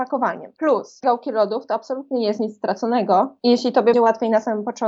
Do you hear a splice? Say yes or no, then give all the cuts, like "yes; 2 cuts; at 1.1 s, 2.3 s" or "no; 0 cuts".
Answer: yes; 2 cuts; at 1.0 s, 3.9 s